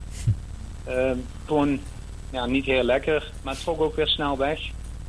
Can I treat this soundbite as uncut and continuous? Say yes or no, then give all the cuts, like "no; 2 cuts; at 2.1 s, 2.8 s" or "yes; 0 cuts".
no; 1 cut; at 1.5 s